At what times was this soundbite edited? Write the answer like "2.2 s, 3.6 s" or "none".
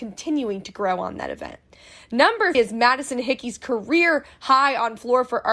2.5 s

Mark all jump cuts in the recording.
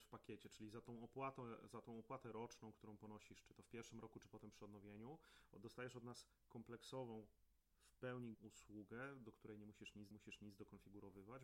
8.3 s, 10.1 s

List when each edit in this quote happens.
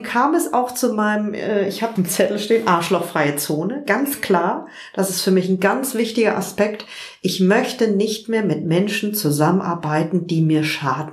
2.0 s

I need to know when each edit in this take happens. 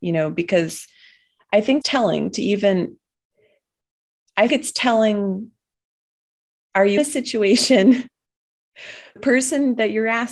1.8 s, 4.5 s, 7.0 s, 9.2 s

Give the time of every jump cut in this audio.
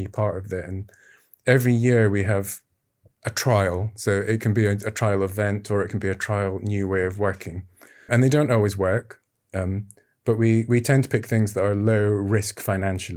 8.1 s

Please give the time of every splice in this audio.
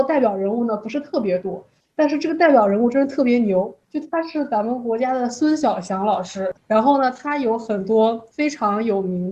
3.8 s

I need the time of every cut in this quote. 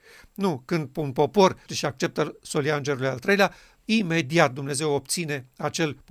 1.7 s

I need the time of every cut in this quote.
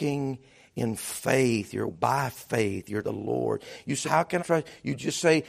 1.9 s, 3.0 s, 4.0 s, 4.4 s

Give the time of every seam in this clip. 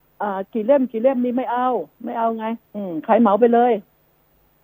1.9 s, 2.7 s

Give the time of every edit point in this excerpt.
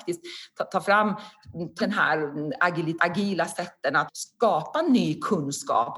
1.8 s, 3.0 s, 4.1 s

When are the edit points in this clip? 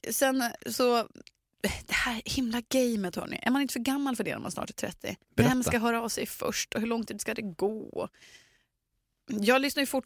5.2 s

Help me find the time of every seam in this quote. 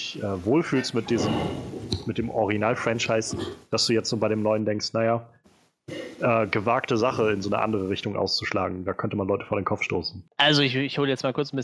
10.3 s

